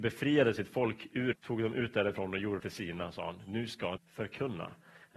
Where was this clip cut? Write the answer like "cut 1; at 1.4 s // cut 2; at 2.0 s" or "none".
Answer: cut 1; at 1.3 s // cut 2; at 2.6 s // cut 3; at 4.0 s